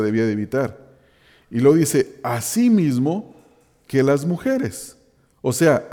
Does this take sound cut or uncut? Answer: uncut